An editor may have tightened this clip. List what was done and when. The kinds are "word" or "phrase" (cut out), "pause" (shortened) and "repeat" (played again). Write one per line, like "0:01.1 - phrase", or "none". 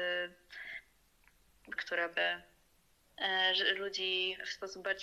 0:01.8 - word